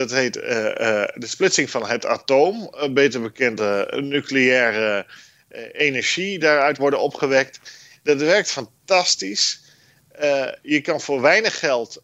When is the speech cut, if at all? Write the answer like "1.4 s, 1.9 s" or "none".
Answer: 3.6 s, 6.4 s, 6.8 s